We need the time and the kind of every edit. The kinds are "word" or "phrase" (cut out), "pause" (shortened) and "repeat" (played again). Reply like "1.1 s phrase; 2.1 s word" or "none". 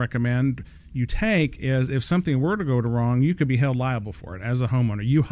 none